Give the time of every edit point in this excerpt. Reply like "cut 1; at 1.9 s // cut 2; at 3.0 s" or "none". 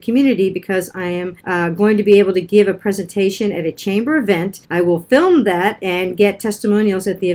cut 1; at 1.4 s // cut 2; at 4.6 s

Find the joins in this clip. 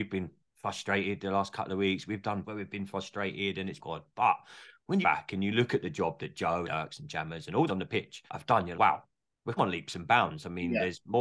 cut 1; at 2.4 s // cut 2; at 3.8 s // cut 3; at 5.0 s // cut 4; at 6.6 s // cut 5; at 7.7 s // cut 6; at 8.3 s // cut 7; at 8.7 s // cut 8; at 9.6 s

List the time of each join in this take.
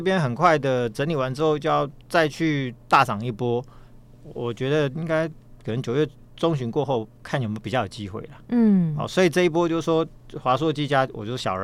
cut 1; at 2.0 s

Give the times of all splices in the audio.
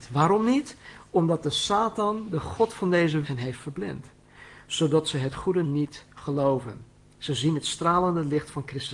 cut 1; at 3.2 s // cut 2; at 5.6 s

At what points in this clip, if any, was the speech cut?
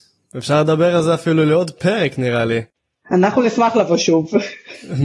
none

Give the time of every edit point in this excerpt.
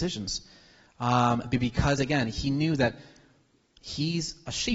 none

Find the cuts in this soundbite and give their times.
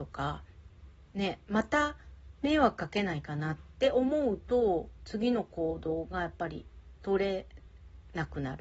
none

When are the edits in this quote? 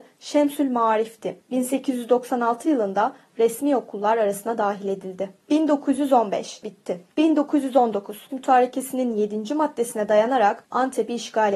cut 1; at 6.6 s // cut 2; at 8.3 s

